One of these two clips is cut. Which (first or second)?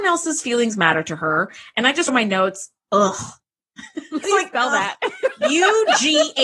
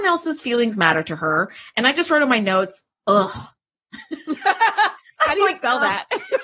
first